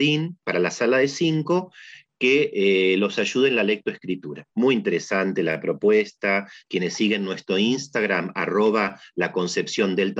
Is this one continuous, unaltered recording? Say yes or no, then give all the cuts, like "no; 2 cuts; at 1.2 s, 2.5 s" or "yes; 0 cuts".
no; 1 cut; at 4.5 s